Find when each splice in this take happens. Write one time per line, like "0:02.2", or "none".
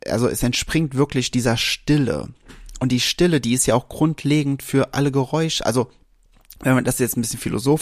none